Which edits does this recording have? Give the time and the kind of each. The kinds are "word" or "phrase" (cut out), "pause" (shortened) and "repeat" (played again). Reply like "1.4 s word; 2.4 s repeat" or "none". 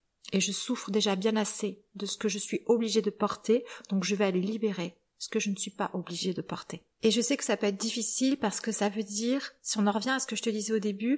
6.9 s pause